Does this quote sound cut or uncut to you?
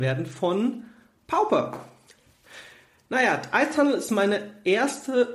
uncut